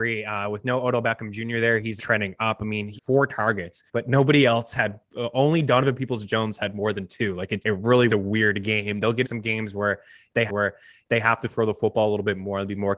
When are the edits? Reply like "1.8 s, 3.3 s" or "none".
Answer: 2.0 s, 3.0 s, 3.9 s, 7.6 s, 8.1 s, 9.2 s, 10.5 s